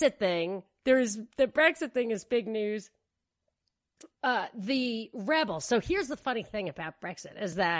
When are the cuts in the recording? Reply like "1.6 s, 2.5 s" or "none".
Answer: 4.1 s